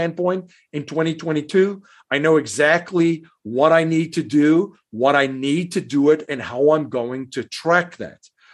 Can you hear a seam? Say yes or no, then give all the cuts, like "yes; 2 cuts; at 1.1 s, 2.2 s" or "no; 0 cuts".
no; 0 cuts